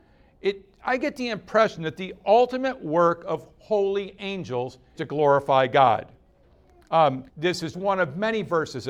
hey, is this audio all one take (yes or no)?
no